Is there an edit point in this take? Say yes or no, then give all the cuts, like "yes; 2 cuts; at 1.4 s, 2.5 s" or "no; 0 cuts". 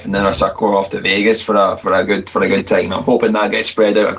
no; 0 cuts